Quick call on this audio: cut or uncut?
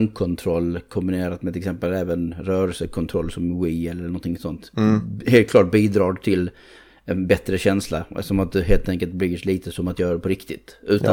uncut